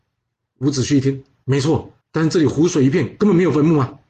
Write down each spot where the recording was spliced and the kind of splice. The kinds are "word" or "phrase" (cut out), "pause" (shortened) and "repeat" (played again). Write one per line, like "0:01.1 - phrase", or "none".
0:02.0 - pause